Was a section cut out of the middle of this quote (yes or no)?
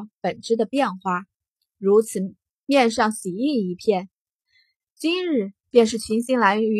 no